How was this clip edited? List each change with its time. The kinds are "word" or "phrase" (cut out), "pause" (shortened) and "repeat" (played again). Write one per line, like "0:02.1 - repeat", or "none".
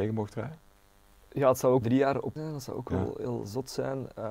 0:01.8 - word
0:02.4 - word